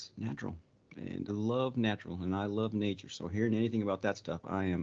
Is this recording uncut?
no; 1 cut; at 1.3 s

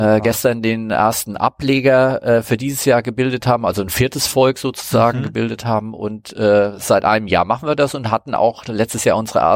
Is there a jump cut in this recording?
no; 0 cuts

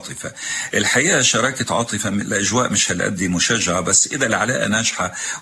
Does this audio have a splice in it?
no; 0 cuts

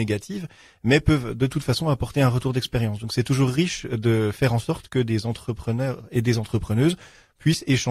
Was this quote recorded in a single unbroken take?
yes; 0 cuts

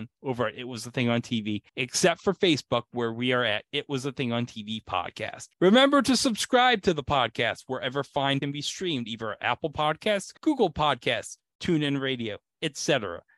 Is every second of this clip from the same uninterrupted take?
no; 4 cuts; at 1.7 s, 5.5 s, 8.4 s, 10.4 s

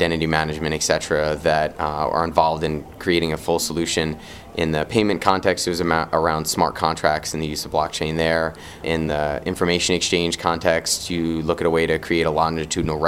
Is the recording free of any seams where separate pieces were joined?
yes; 0 cuts

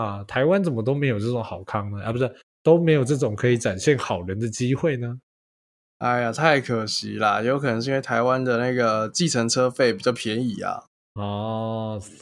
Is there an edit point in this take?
no; 0 cuts

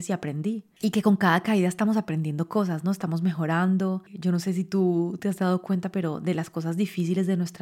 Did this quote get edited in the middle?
no; 0 cuts

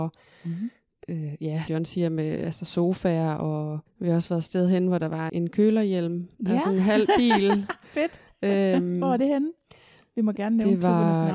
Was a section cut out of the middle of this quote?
yes; 4 cuts; at 1.7 s, 3.9 s, 5.3 s, 6.3 s

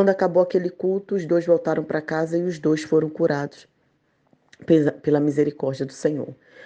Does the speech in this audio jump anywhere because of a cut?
no; 0 cuts

